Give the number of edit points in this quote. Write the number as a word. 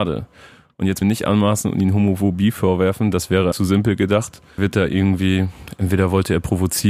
three